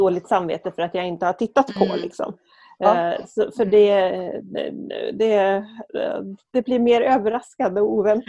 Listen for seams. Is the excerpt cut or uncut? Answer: uncut